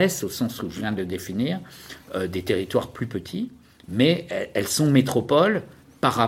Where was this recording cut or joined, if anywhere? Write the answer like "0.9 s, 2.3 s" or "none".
none